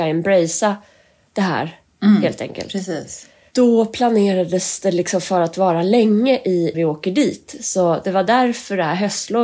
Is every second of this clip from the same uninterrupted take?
no; 1 cut; at 6.7 s

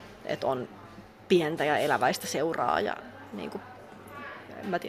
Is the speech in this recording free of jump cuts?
yes; 0 cuts

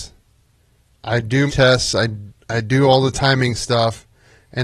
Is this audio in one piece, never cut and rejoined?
no; 2 cuts; at 1.5 s, 2.3 s

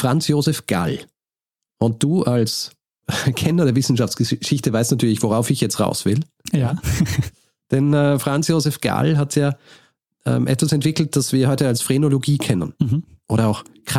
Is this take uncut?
yes; 0 cuts

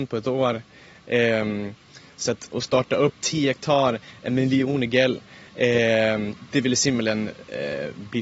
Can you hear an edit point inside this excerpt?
no; 0 cuts

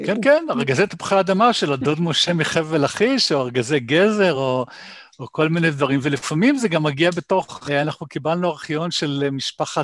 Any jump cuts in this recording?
no; 0 cuts

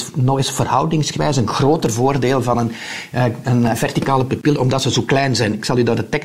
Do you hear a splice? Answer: no; 0 cuts

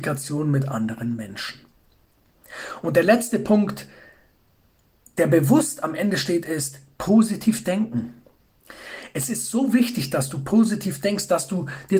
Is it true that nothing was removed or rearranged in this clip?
yes; 0 cuts

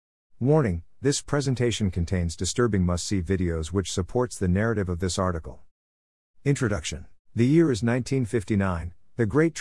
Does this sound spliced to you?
yes; 1 cut; at 7.2 s

